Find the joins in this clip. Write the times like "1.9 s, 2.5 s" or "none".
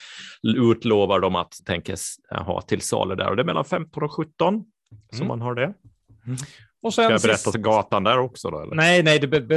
1.6 s